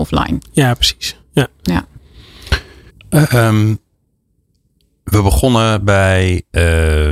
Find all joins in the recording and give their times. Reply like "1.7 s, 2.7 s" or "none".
1.2 s, 2.9 s